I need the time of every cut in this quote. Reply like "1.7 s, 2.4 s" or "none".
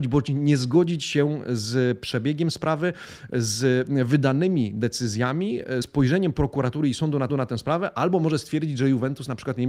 5.8 s, 7.3 s